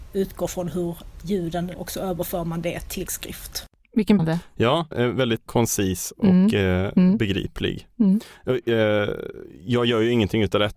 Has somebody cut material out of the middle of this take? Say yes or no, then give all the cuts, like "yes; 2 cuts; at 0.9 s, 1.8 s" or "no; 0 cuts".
yes; 5 cuts; at 1.7 s, 3.1 s, 4.2 s, 4.9 s, 5.5 s